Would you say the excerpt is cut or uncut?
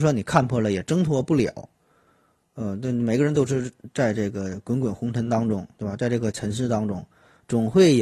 uncut